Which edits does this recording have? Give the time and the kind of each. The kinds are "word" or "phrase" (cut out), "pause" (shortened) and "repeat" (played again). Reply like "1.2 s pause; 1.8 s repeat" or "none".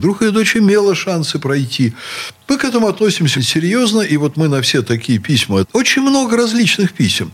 3.3 s word; 5.6 s phrase